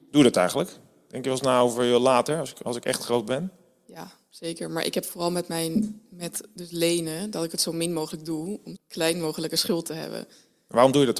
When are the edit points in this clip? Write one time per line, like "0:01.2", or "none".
0:08.8